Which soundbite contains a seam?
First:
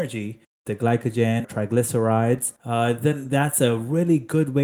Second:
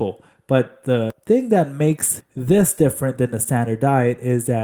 first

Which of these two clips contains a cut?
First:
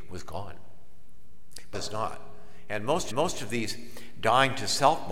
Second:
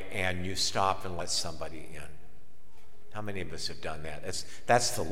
first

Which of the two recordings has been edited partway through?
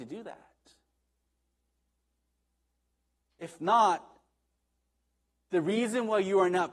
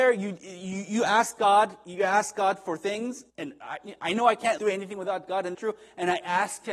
second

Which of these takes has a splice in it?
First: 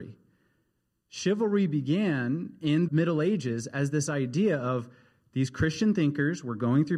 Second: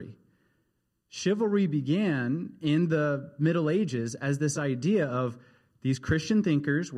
first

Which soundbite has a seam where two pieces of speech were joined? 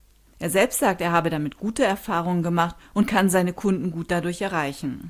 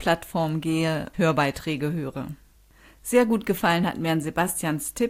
second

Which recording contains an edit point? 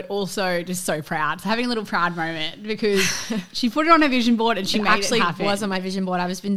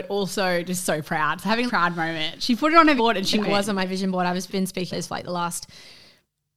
second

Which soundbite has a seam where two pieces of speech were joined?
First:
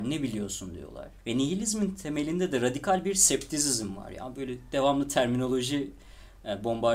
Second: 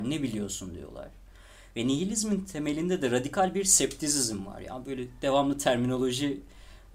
first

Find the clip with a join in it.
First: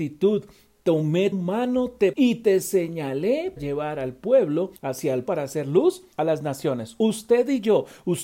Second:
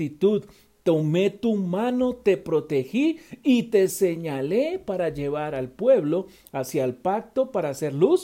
first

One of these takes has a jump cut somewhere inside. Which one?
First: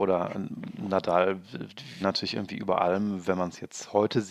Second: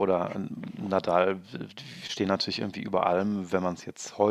first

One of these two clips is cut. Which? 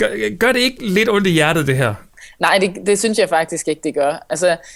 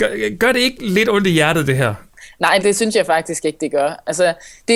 second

